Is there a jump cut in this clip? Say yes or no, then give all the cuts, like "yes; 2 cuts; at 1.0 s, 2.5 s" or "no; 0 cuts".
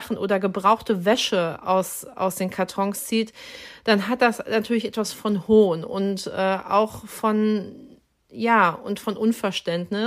no; 0 cuts